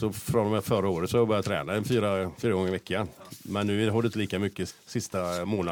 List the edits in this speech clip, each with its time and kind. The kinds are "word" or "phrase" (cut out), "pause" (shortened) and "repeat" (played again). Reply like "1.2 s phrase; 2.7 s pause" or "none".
4.1 s word; 4.7 s word